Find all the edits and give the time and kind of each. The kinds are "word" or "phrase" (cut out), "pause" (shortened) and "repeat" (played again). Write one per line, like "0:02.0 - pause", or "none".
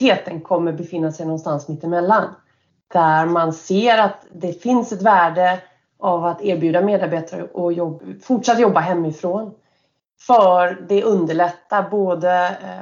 none